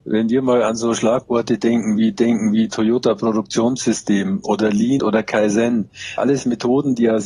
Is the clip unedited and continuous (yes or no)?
no